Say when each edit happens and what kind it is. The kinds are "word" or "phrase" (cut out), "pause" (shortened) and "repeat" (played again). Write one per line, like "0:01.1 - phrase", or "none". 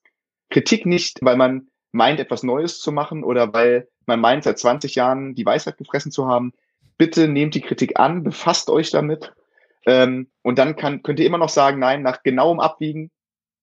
0:01.2 - word